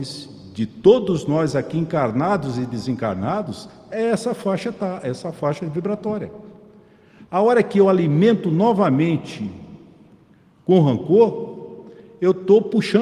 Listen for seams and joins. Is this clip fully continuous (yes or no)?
yes